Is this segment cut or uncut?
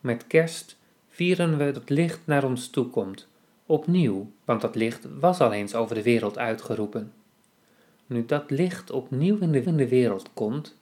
cut